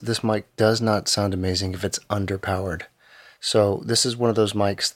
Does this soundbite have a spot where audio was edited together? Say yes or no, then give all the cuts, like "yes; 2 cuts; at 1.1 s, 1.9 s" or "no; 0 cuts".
no; 0 cuts